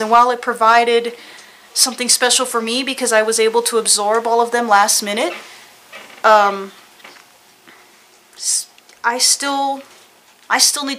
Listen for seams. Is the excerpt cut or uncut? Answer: uncut